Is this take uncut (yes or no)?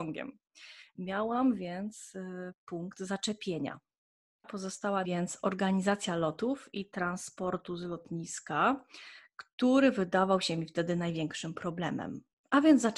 no